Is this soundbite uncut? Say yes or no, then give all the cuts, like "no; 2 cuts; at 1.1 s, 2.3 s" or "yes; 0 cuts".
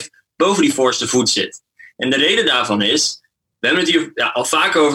yes; 0 cuts